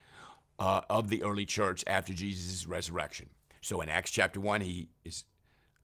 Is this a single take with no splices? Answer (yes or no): yes